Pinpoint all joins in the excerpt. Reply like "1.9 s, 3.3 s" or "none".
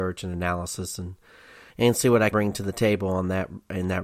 1.7 s, 2.3 s